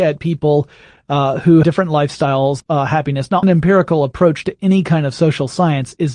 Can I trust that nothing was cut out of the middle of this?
no; 3 cuts; at 1.6 s, 2.6 s, 3.4 s

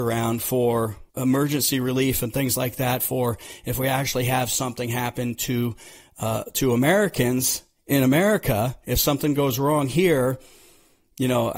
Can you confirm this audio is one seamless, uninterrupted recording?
no; 1 cut; at 1.1 s

